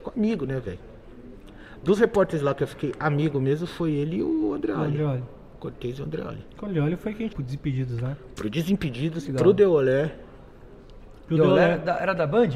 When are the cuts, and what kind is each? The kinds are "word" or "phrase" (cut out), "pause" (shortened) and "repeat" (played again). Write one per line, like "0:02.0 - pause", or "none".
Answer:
0:07.3 - word